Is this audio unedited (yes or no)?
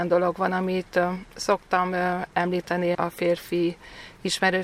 no